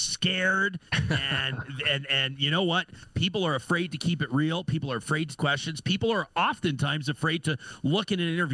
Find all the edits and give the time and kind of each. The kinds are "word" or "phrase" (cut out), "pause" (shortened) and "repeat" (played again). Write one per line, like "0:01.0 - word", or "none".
0:05.4 - phrase